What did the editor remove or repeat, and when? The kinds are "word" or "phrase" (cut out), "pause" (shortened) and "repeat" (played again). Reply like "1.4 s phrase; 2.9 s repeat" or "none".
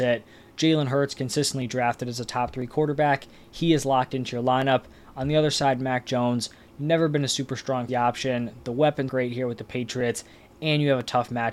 7.9 s word; 9.1 s word